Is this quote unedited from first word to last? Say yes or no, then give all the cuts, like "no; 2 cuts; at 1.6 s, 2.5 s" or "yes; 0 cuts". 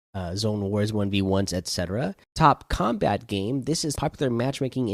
no; 2 cuts; at 2.2 s, 4.0 s